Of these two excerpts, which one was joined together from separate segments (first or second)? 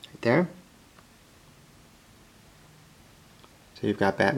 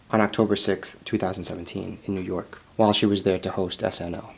second